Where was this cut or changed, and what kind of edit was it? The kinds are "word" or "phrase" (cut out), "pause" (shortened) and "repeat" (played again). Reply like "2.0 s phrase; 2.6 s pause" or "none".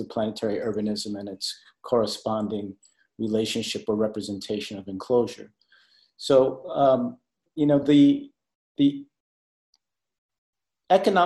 none

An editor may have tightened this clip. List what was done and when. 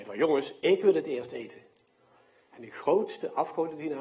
none

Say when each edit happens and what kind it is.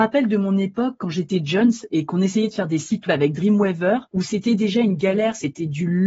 3.1 s word; 4.1 s pause

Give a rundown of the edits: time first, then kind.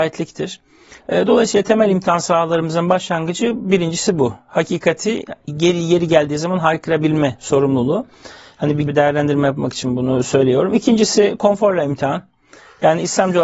8.9 s word

